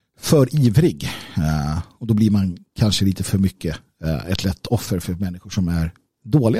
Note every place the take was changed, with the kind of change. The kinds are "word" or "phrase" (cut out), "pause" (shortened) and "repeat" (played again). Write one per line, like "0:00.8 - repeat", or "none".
none